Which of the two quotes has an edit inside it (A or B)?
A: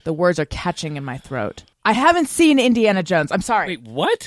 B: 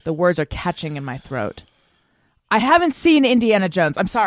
A